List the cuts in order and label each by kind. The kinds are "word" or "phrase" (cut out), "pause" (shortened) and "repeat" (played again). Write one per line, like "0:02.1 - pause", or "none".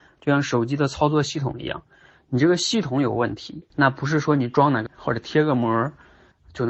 0:03.7 - pause
0:04.9 - word